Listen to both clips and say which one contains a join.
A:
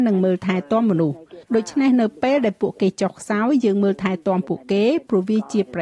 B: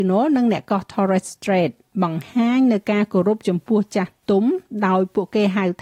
A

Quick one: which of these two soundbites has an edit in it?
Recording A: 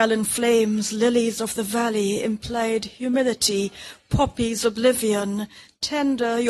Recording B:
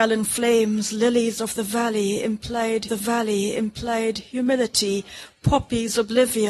B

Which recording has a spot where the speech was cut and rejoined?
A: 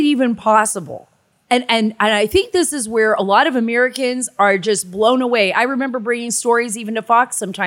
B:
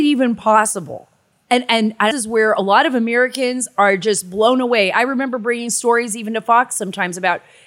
B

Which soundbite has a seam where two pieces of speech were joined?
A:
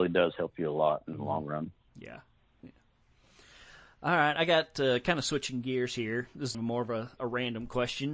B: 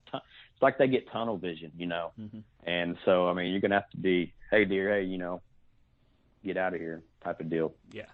A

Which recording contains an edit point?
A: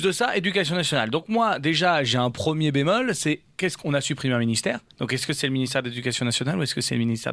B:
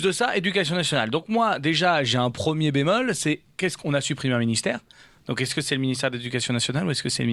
A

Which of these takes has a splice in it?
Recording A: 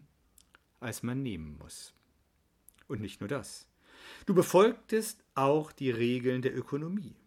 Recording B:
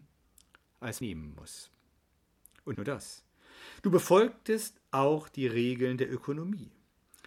B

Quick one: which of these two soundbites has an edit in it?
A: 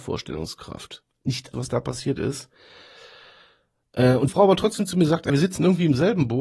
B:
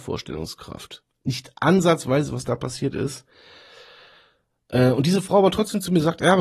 A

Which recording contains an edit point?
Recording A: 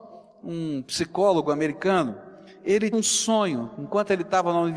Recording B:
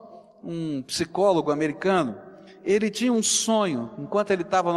A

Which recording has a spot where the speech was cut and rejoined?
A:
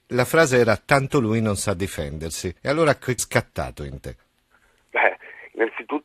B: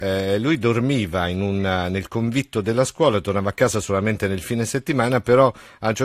A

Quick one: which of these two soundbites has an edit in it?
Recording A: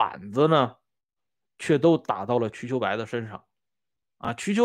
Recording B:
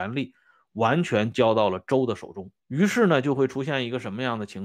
B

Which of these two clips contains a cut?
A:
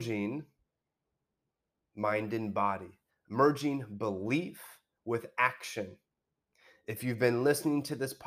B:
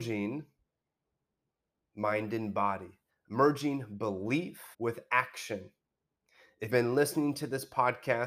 B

